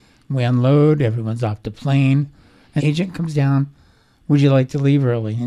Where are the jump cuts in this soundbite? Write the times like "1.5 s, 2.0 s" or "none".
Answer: 2.8 s